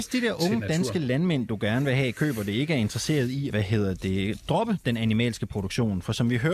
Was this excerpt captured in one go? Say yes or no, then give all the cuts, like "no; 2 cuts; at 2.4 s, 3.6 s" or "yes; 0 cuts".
no; 1 cut; at 3.5 s